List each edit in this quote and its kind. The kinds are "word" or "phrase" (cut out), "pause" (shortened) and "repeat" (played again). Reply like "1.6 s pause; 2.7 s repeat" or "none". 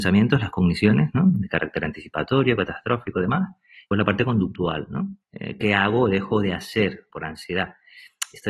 3.9 s word; 5.2 s pause; 7.1 s word